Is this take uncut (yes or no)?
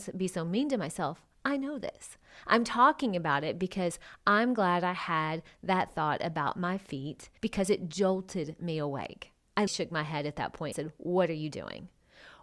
no